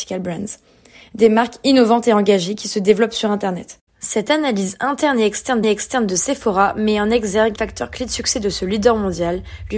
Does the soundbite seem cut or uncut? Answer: cut